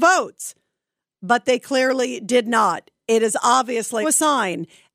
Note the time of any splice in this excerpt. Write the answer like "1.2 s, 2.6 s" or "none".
4.0 s